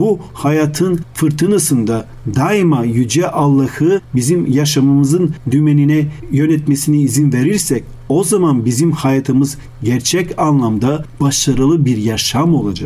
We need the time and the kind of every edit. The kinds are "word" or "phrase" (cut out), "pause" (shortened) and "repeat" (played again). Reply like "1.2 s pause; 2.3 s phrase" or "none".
none